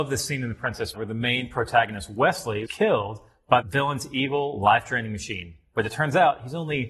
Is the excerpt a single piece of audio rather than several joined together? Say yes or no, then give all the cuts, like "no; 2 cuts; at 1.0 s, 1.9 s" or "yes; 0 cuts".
no; 3 cuts; at 0.9 s, 2.7 s, 3.6 s